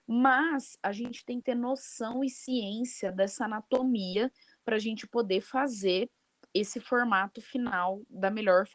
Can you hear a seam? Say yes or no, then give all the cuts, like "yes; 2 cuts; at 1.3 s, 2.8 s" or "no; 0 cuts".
no; 0 cuts